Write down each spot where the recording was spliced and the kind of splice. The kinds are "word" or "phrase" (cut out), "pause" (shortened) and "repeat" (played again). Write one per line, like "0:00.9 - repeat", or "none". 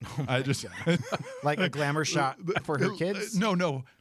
0:01.0 - word
0:02.6 - word